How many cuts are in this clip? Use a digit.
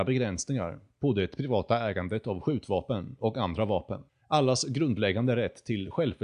1